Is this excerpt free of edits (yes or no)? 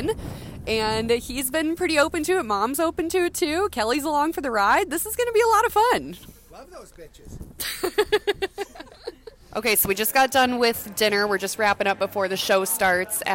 yes